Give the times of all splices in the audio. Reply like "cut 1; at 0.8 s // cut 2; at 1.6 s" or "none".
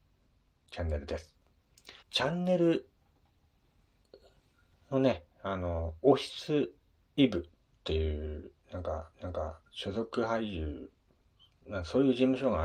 cut 1; at 2.0 s // cut 2; at 9.1 s // cut 3; at 11.2 s